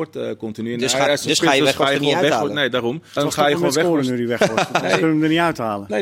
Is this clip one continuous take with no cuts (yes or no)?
no